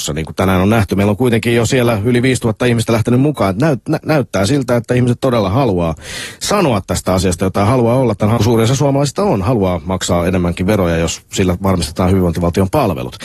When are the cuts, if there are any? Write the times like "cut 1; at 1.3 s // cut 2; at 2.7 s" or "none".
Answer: cut 1; at 8.4 s